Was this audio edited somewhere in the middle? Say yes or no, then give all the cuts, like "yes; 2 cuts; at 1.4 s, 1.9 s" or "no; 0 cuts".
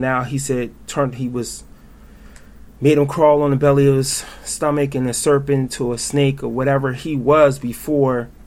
yes; 1 cut; at 2.7 s